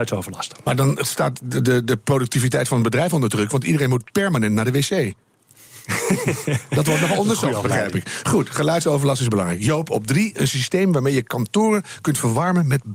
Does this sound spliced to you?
no; 0 cuts

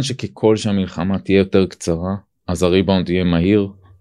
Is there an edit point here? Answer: no; 0 cuts

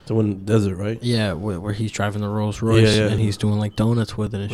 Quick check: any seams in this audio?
no; 0 cuts

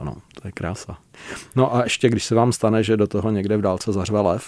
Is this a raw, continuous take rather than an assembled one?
yes; 0 cuts

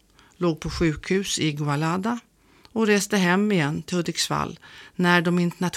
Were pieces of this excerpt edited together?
no; 0 cuts

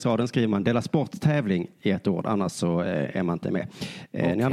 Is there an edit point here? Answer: no; 0 cuts

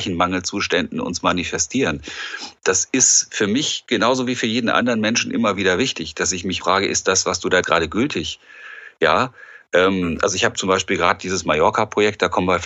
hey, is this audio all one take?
no; 2 cuts; at 6.6 s, 7.6 s

